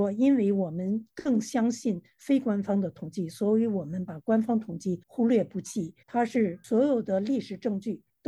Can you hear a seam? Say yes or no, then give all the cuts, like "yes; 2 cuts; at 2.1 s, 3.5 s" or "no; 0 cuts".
yes; 2 cuts; at 5.0 s, 6.0 s